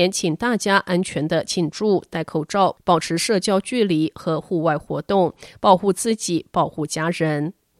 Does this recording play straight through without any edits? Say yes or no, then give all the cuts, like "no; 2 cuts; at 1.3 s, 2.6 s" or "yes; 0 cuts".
yes; 0 cuts